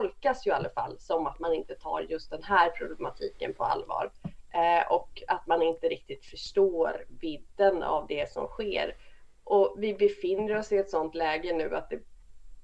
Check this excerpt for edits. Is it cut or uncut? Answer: uncut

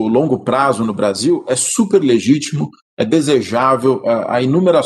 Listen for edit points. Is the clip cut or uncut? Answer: uncut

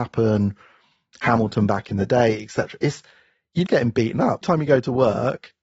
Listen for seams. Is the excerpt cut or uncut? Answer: cut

